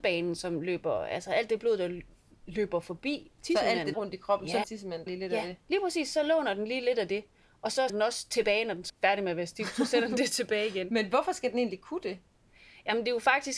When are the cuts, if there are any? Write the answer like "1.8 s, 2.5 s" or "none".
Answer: 3.9 s, 4.6 s, 5.1 s, 7.9 s, 8.9 s